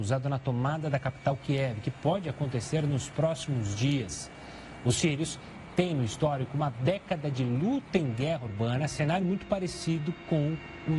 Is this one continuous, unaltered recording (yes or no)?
yes